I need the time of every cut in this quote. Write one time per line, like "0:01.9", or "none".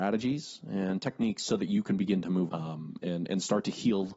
0:02.5